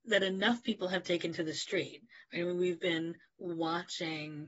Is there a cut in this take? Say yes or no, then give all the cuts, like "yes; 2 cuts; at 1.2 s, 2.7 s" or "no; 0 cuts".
no; 0 cuts